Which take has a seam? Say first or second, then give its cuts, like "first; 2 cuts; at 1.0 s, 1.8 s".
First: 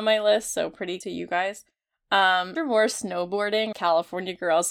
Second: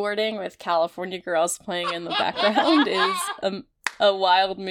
first; 3 cuts; at 1.0 s, 2.6 s, 3.7 s